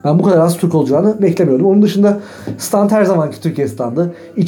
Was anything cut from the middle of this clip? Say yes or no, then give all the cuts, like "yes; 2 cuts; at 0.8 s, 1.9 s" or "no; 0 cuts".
no; 0 cuts